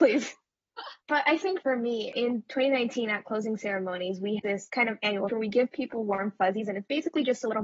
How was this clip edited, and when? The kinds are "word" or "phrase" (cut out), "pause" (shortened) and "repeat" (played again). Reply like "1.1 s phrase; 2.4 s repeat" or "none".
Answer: 4.4 s word; 5.3 s phrase

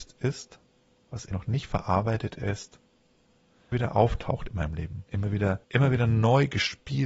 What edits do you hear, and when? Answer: 1.3 s word; 3.7 s word; 5.1 s pause; 5.6 s pause

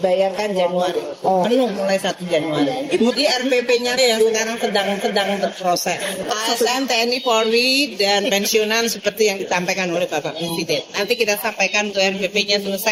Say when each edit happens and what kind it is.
4.0 s word; 5.0 s repeat; 11.9 s word

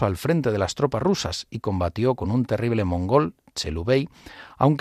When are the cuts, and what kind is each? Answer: none

